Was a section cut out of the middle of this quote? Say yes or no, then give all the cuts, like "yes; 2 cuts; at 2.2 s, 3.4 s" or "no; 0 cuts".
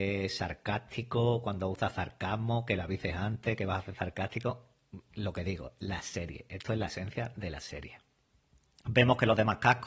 no; 0 cuts